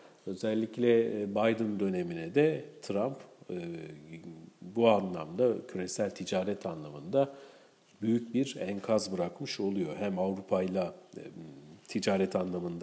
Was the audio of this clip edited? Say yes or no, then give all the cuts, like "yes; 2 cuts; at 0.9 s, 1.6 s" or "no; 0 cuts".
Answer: no; 0 cuts